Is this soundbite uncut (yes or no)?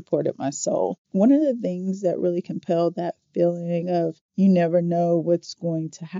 no